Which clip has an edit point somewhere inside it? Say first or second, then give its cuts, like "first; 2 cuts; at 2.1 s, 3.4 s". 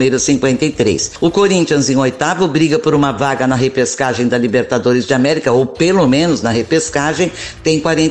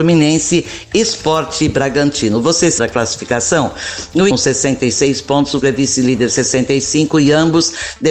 second; 3 cuts; at 2.8 s, 4.3 s, 5.6 s